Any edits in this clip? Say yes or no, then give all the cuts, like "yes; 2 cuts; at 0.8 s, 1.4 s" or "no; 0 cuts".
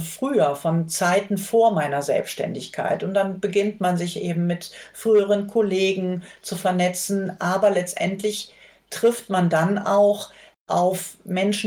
no; 0 cuts